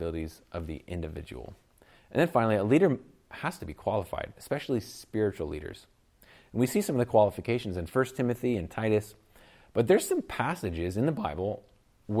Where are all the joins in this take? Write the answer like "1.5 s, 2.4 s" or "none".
none